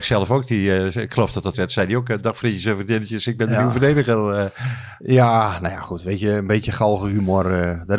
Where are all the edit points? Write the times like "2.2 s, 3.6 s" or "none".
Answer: 1.5 s